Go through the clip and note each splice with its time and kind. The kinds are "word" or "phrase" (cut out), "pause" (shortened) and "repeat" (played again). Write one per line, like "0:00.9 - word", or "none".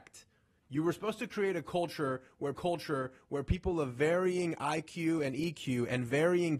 0:02.5 - repeat